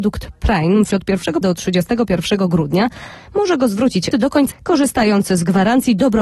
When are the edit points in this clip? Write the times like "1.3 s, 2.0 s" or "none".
0.9 s, 1.4 s, 4.1 s, 4.5 s